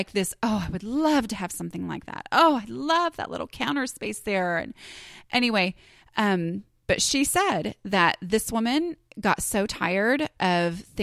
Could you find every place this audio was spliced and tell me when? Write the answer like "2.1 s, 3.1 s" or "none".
none